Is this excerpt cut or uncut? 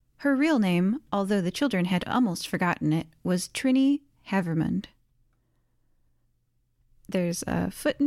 uncut